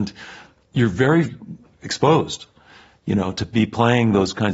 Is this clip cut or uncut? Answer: uncut